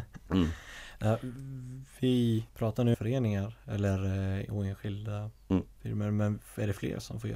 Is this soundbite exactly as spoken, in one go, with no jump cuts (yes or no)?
no